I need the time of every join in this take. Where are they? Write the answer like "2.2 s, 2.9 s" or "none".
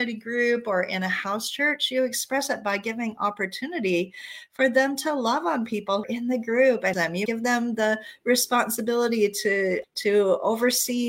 6.0 s, 6.9 s, 7.3 s, 9.8 s